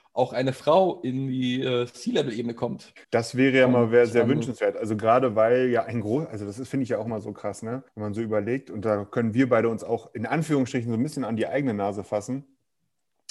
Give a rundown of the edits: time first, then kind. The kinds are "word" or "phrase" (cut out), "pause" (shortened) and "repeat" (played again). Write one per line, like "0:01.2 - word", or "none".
0:03.0 - pause
0:07.9 - pause